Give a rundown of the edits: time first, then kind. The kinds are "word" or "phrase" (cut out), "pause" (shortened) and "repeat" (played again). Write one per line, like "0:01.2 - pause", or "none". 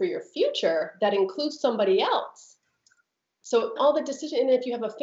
0:03.8 - word